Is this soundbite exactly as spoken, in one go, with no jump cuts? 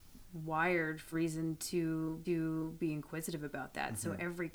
no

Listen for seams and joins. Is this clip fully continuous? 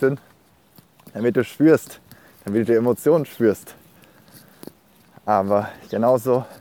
yes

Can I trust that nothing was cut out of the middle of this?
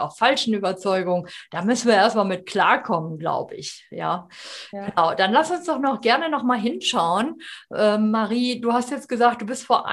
yes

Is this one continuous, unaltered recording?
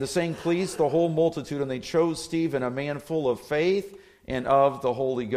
yes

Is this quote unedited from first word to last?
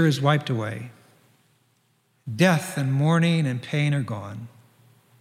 yes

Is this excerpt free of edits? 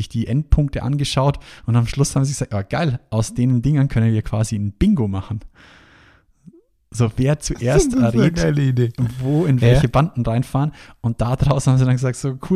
yes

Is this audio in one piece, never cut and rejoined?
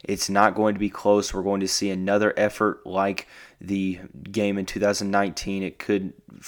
yes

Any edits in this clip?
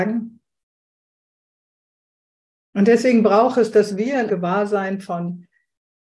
yes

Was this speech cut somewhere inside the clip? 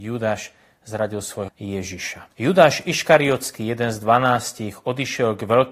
yes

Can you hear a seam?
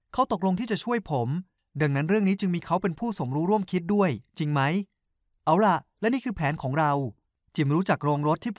no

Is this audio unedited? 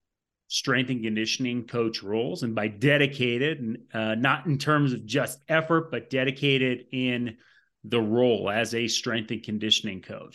yes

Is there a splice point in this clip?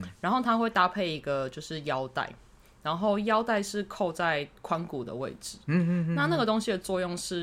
no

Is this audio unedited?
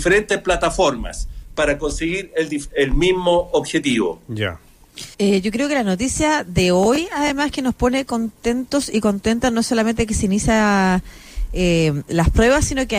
no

